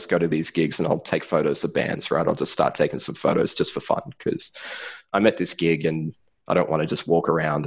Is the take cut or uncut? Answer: uncut